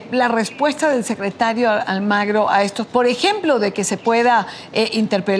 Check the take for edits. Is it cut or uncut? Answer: cut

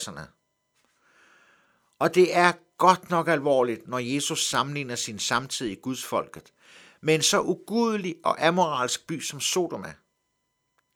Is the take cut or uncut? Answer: uncut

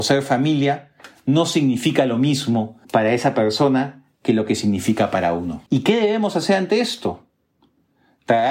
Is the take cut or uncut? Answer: cut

